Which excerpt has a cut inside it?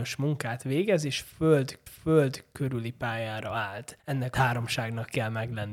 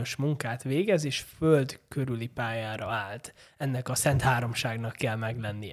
first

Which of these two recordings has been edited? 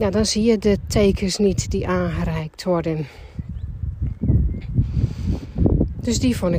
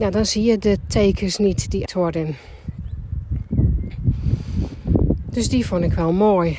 second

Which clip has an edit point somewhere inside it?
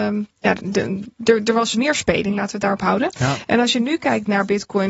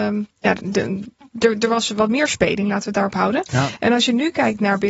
first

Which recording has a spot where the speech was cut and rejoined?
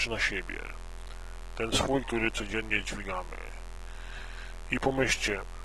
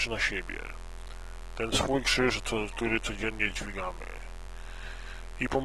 first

